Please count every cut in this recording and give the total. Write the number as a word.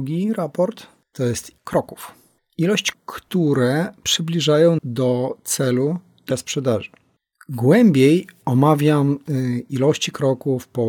four